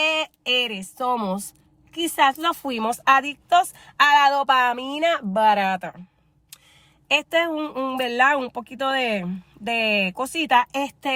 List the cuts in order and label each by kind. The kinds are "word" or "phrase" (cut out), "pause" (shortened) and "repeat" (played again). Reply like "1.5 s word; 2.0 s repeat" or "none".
none